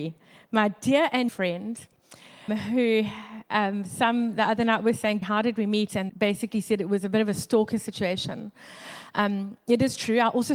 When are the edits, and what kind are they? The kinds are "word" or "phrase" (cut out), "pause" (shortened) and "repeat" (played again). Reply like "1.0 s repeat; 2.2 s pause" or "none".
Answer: 1.3 s word; 2.5 s word; 5.2 s word; 6.1 s word